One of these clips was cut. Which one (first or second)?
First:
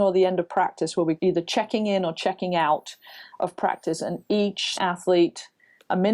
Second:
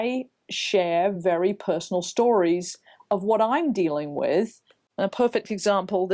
first